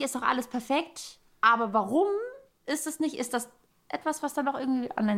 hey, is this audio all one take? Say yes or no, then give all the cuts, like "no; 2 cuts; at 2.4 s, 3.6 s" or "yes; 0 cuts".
yes; 0 cuts